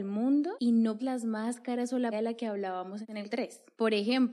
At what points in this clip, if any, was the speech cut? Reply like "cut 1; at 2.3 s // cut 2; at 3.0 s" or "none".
cut 1; at 1.0 s // cut 2; at 2.1 s // cut 3; at 3.3 s